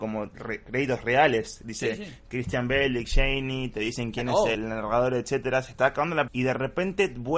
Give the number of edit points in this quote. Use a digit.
2